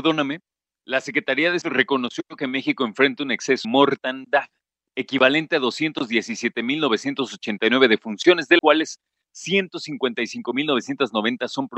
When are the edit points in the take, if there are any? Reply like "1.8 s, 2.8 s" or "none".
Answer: 1.6 s, 3.6 s, 8.6 s